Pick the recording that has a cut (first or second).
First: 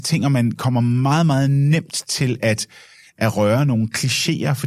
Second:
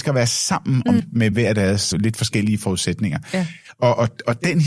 second